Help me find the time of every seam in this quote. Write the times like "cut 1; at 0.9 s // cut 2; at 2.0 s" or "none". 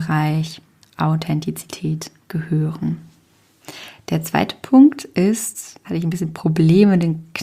cut 1; at 5.8 s